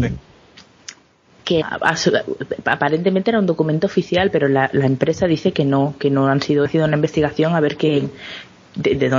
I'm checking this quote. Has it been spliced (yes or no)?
yes